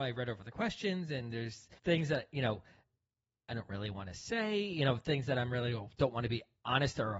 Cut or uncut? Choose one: cut